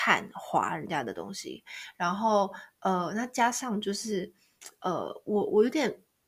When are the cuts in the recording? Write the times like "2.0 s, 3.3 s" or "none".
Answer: none